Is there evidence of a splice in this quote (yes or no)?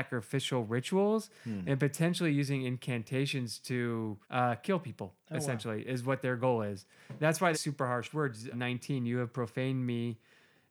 yes